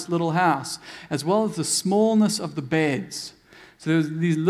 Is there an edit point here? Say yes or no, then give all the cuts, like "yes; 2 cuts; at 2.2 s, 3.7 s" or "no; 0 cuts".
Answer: no; 0 cuts